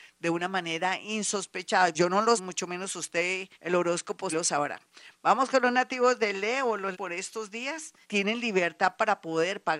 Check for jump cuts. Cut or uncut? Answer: cut